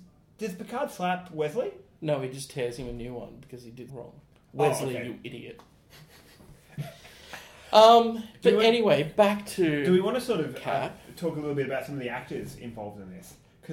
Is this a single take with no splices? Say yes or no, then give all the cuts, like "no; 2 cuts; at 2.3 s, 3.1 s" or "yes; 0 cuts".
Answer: no; 1 cut; at 3.9 s